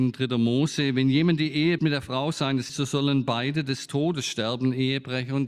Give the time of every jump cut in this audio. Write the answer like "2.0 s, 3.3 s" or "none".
1.8 s, 2.7 s